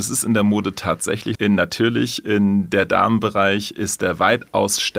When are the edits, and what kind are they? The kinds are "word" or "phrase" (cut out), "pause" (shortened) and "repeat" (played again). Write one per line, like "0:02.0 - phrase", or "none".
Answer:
0:01.4 - word

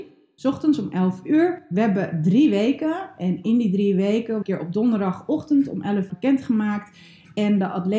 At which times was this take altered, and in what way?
0:04.4 - phrase
0:06.1 - phrase

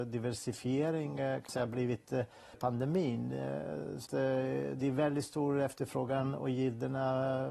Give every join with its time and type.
0:01.5 - word
0:02.5 - word
0:04.1 - word

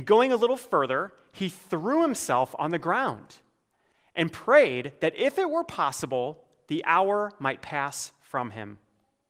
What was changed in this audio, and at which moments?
none

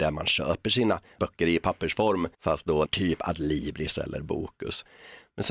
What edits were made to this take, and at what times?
0:02.3 - pause
0:02.8 - word

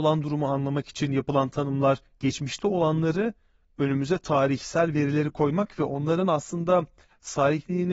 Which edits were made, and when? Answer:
none

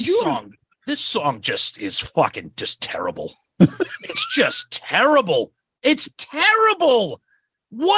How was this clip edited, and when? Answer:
none

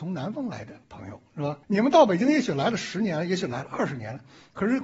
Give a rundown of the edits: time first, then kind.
0:01.6 - pause

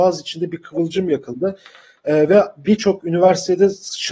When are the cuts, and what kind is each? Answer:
none

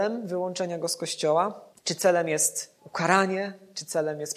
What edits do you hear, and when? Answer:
0:01.7 - pause
0:02.8 - pause

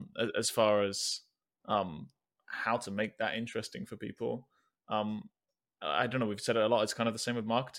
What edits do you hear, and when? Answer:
none

